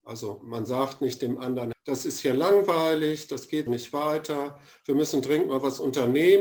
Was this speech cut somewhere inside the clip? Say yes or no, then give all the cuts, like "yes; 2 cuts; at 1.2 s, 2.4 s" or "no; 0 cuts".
yes; 2 cuts; at 1.7 s, 3.7 s